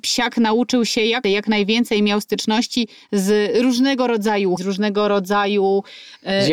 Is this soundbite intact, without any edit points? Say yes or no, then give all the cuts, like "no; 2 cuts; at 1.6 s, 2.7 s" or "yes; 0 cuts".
no; 2 cuts; at 1.2 s, 4.6 s